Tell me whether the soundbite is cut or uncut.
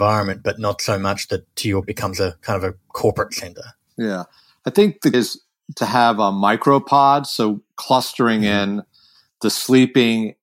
cut